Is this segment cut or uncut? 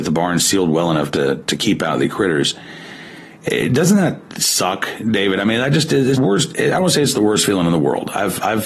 cut